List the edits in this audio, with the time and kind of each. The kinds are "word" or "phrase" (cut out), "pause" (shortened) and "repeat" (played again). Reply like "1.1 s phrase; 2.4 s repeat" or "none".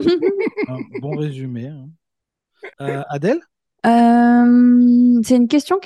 2.7 s pause; 3.7 s pause